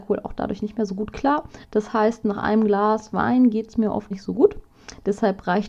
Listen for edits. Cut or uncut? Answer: cut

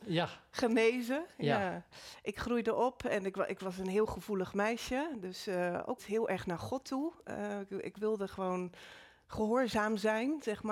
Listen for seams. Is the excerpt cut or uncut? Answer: cut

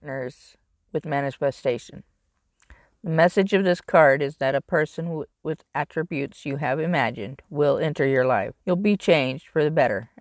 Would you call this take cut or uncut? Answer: cut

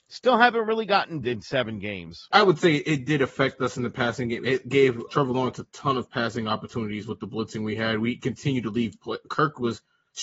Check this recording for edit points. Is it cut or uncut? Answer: cut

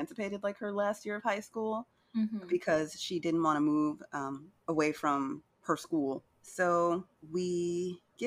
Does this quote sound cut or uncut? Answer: uncut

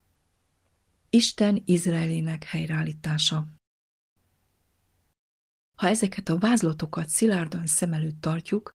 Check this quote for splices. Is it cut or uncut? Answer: uncut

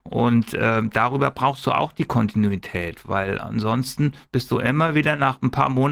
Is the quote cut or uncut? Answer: uncut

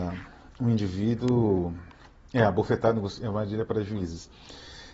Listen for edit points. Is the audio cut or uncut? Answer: uncut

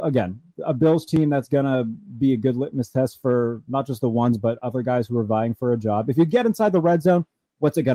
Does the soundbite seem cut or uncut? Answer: uncut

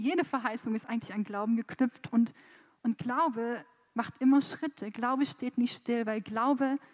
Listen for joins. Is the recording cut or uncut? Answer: uncut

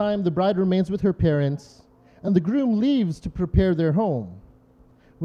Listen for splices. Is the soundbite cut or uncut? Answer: uncut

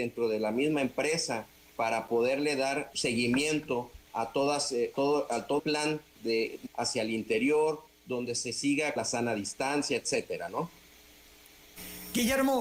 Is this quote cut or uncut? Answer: cut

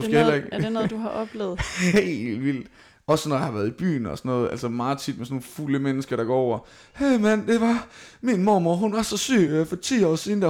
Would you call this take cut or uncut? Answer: uncut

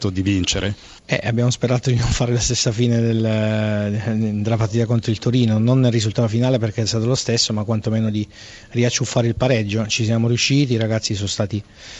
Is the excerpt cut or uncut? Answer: uncut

